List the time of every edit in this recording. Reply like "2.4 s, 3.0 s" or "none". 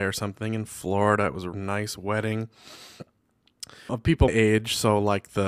1.5 s, 3.9 s, 4.3 s